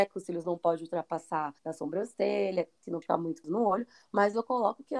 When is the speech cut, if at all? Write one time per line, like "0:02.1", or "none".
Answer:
0:01.6
0:03.0
0:03.4